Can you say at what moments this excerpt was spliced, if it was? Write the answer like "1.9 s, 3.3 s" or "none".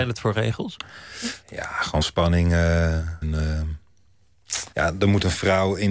1.4 s, 2.0 s, 3.2 s, 4.7 s